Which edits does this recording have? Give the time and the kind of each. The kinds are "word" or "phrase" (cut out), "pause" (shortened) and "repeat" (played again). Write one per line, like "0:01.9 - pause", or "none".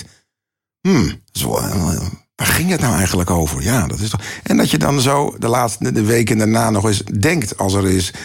none

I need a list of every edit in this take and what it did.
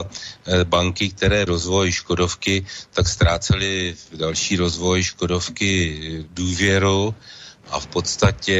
0:01.5 - phrase
0:04.0 - word

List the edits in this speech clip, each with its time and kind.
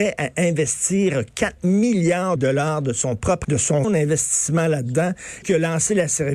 0:02.4 - word
0:03.4 - word
0:03.8 - word
0:05.4 - word

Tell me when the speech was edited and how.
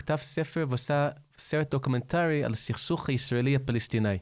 none

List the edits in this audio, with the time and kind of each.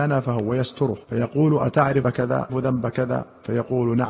0:01.0 - pause
0:02.0 - word
0:02.5 - word

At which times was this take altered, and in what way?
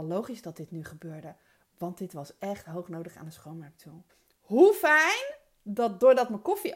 0:04.1 - pause

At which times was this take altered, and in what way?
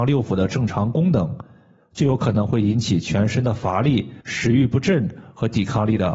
0:04.2 - pause

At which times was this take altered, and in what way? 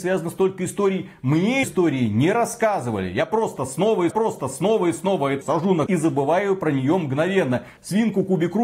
0:01.6 - word
0:04.1 - repeat
0:05.4 - word
0:05.9 - word

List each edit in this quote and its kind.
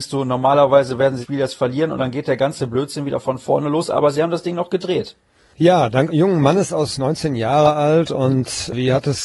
0:01.2 - word
0:06.1 - word
0:07.0 - word

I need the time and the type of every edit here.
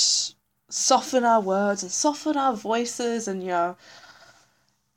none

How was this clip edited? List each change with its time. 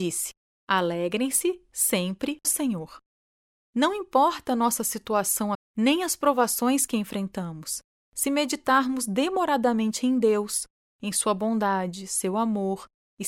0:02.4 - word
0:05.5 - word

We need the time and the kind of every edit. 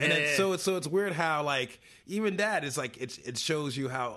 none

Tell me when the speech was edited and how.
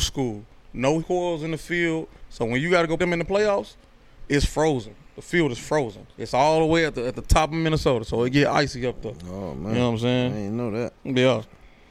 0:01.0 - word
0:03.0 - word
0:06.1 - pause

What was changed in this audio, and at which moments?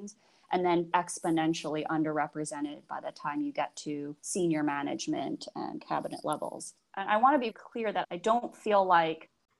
0:00.9 - word
0:04.2 - pause
0:07.5 - word
0:08.0 - word

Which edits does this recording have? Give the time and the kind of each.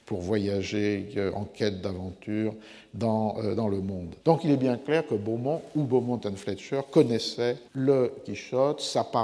0:04.2 - pause
0:07.7 - pause

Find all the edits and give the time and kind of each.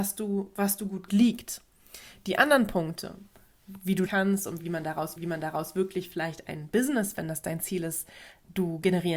0:01.1 - phrase
0:04.1 - phrase
0:05.2 - repeat

